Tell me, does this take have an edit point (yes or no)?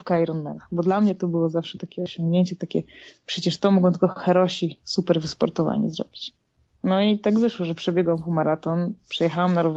no